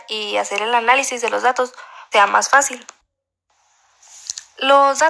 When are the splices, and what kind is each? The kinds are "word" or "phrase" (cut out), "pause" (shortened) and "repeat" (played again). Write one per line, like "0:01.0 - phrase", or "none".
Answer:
0:02.1 - word